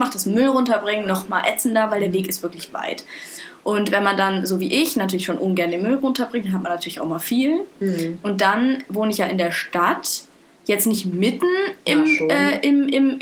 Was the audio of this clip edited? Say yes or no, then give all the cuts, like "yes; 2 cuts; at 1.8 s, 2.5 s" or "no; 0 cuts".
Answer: no; 0 cuts